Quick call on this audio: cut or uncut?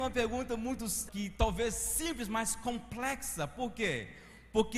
cut